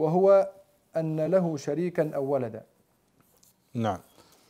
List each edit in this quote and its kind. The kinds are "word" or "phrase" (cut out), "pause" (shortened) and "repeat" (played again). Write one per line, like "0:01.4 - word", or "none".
none